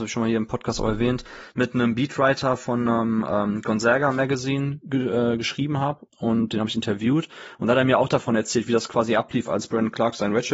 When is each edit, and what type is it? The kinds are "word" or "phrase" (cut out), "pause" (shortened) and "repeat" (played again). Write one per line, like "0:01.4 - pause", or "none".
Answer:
none